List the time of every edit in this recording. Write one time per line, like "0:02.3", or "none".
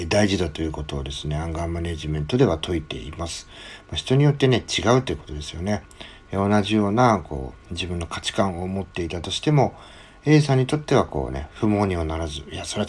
0:07.6